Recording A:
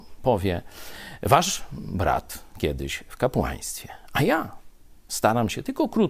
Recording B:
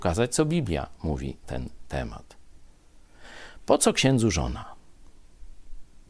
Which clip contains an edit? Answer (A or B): B